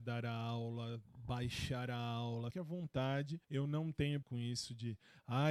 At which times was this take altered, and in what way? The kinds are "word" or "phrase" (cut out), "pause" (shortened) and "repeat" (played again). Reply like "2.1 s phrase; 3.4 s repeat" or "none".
2.5 s word; 3.4 s pause; 4.2 s word